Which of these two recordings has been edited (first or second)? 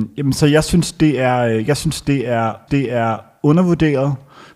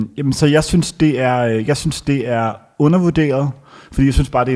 first